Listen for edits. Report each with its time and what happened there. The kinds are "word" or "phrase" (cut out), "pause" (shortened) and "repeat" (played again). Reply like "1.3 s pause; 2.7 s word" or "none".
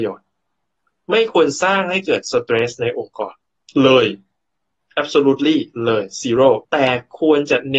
6.6 s word